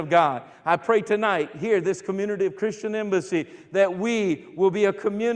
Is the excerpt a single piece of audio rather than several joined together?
yes; 0 cuts

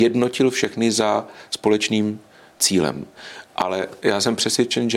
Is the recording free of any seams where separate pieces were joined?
yes; 0 cuts

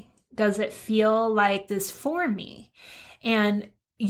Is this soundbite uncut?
no; 1 cut; at 1.7 s

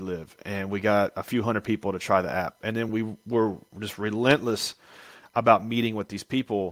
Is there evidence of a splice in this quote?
no; 0 cuts

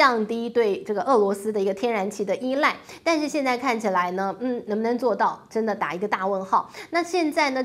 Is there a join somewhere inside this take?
no; 0 cuts

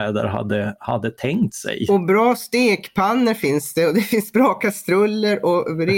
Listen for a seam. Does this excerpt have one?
no; 0 cuts

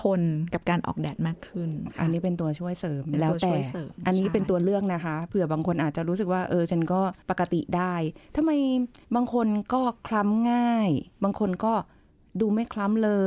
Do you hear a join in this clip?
yes; 3 cuts; at 1.9 s, 7.2 s, 9.0 s

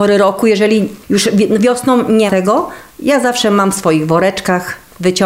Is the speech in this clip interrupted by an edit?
yes; 1 cut; at 2.3 s

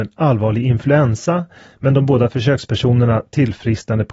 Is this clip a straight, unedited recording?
yes; 0 cuts

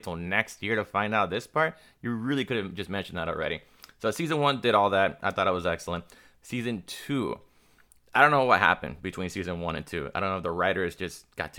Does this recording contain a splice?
no; 0 cuts

